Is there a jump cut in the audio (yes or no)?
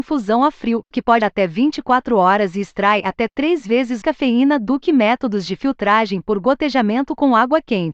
yes